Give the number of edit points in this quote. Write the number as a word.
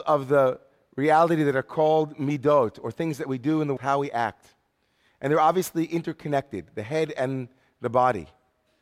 one